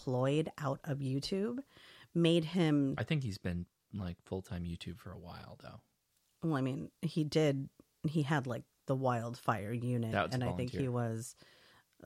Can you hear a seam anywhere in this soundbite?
no; 0 cuts

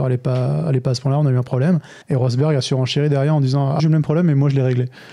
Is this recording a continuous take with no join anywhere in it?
no; 2 cuts; at 2.0 s, 3.8 s

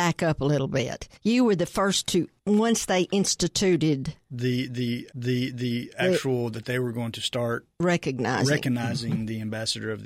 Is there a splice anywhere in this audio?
yes; 4 cuts; at 1.2 s, 2.4 s, 5.1 s, 7.7 s

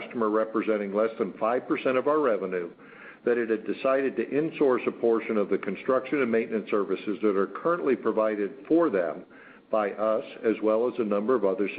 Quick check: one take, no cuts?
yes; 0 cuts

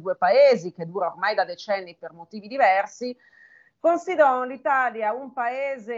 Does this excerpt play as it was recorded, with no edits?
yes; 0 cuts

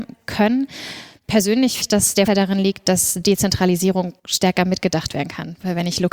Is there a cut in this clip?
yes; 3 cuts; at 1.8 s, 2.3 s, 4.2 s

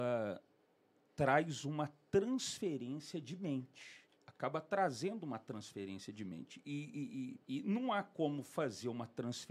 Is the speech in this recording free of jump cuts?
no; 2 cuts; at 4.1 s, 7.4 s

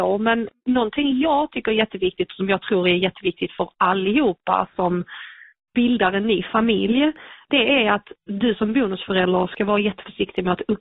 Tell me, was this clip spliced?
no; 0 cuts

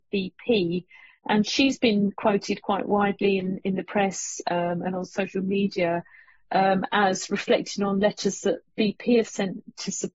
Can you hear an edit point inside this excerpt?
no; 0 cuts

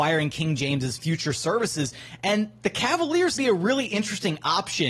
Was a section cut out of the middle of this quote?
yes; 1 cut; at 3.4 s

